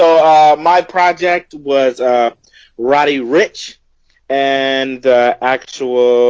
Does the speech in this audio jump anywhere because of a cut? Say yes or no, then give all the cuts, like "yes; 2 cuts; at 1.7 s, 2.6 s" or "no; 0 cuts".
no; 0 cuts